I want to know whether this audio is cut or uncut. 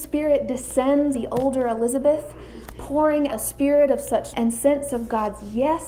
cut